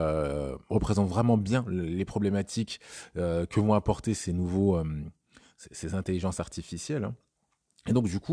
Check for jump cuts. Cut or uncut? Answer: uncut